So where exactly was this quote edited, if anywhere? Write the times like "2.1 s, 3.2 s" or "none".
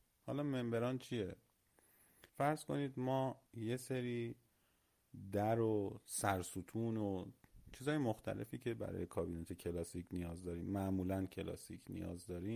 2.3 s, 3.5 s